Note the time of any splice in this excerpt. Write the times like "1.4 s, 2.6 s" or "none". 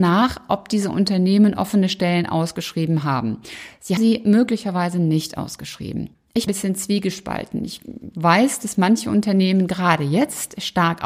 4.0 s, 6.5 s